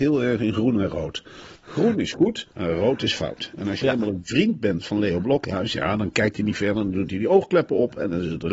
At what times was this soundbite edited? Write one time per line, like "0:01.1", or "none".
0:02.5